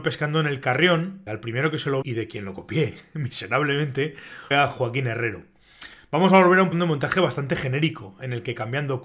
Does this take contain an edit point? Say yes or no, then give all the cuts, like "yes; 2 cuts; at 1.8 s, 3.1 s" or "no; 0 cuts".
yes; 4 cuts; at 1.3 s, 2.0 s, 4.5 s, 6.7 s